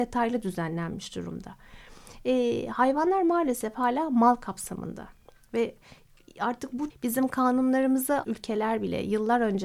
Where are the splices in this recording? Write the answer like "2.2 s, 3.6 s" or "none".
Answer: 6.9 s, 8.2 s